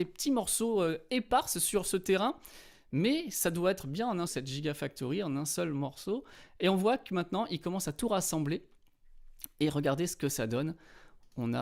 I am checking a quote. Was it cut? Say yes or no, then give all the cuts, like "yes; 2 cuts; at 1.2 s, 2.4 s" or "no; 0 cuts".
yes; 1 cut; at 4.3 s